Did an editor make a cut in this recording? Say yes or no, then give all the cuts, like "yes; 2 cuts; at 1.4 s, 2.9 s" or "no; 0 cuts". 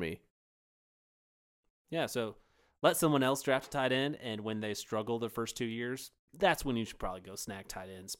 no; 0 cuts